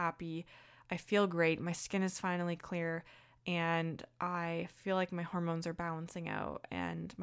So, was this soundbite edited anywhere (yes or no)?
no